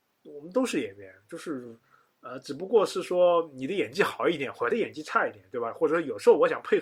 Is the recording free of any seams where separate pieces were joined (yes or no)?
yes